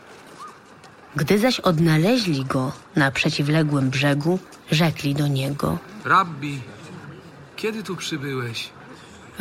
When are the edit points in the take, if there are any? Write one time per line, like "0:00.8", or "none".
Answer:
0:04.6